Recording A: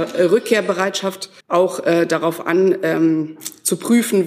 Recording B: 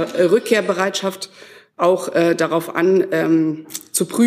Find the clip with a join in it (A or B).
A